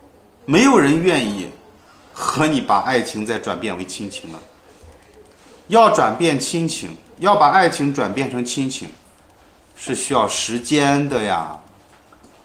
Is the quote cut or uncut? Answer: uncut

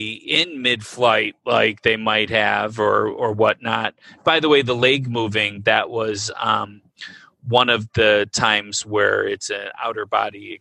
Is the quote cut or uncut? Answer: uncut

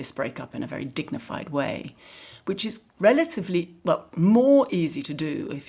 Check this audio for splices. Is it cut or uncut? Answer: uncut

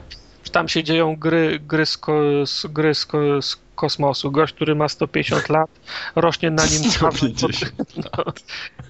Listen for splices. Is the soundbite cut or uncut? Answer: uncut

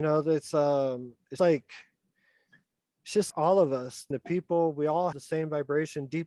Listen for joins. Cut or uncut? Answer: cut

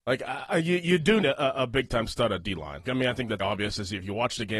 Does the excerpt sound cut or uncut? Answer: cut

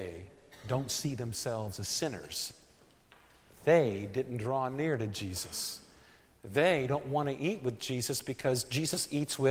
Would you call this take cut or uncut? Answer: uncut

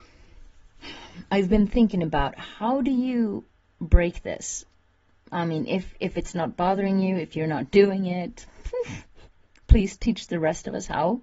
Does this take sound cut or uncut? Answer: uncut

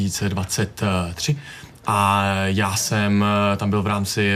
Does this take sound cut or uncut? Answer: uncut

